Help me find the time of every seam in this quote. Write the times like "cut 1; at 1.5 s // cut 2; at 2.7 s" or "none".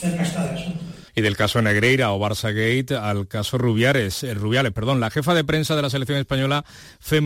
cut 1; at 1.1 s